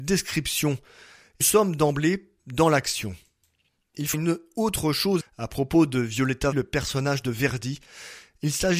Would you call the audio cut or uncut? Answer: cut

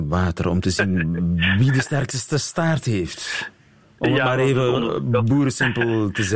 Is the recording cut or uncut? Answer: uncut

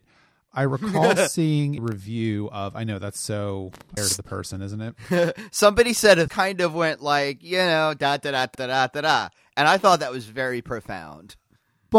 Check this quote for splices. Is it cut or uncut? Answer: cut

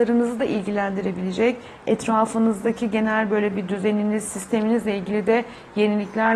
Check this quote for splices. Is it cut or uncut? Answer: uncut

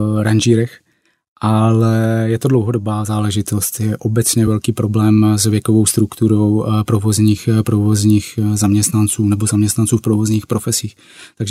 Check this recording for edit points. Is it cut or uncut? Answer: uncut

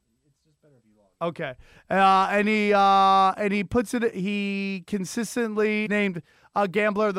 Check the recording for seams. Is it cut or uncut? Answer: cut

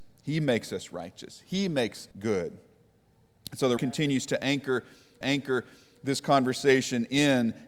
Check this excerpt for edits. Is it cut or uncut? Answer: cut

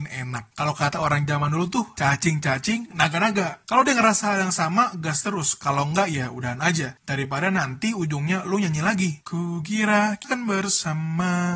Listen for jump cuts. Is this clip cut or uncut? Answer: cut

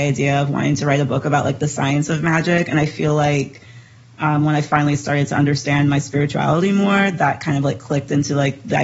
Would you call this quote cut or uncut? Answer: uncut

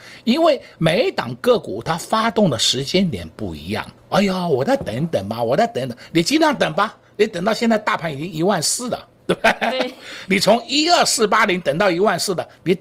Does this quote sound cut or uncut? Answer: cut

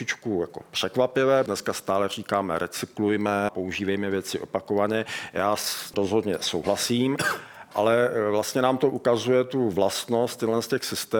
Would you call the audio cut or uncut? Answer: cut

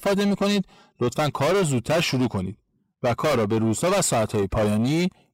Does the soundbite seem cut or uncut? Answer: uncut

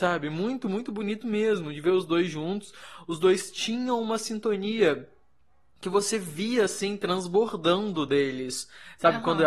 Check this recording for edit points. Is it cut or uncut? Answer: uncut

